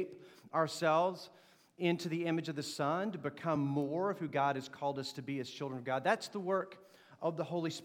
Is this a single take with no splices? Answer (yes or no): yes